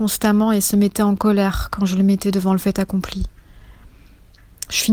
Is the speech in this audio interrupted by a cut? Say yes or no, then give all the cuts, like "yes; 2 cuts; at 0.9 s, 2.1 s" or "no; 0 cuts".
no; 0 cuts